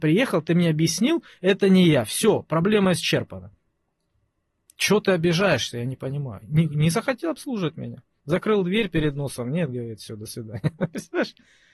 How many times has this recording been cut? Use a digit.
0